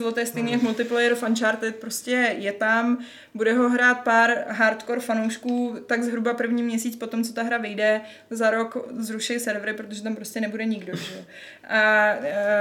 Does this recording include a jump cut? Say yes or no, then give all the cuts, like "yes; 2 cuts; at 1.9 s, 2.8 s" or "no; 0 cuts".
no; 0 cuts